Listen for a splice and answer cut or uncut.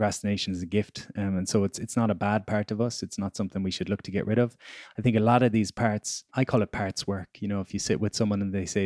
cut